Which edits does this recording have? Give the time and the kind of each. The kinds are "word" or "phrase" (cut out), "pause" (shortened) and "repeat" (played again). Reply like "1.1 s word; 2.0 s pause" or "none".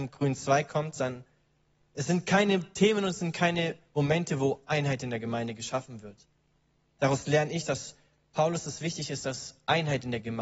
none